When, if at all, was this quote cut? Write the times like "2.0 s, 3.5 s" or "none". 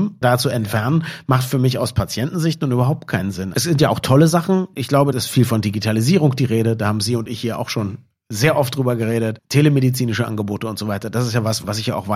none